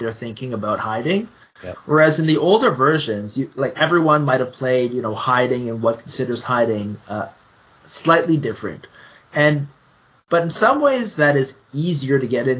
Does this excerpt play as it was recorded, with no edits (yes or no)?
yes